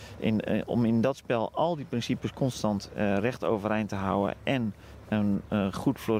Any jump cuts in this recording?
no; 0 cuts

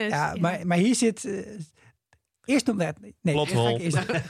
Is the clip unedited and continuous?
yes; 0 cuts

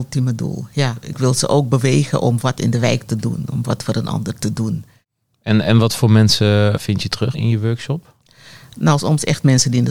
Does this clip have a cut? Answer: yes; 3 cuts; at 6.8 s, 7.3 s, 9.0 s

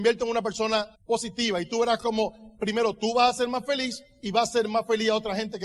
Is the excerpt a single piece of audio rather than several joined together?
no; 1 cut; at 0.9 s

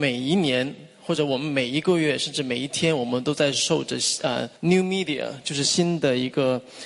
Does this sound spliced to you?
yes; 1 cut; at 4.6 s

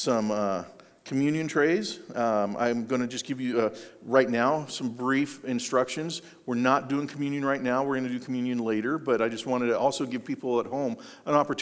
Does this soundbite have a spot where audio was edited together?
no; 0 cuts

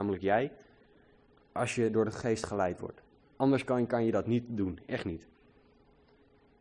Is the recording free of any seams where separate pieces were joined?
yes; 0 cuts

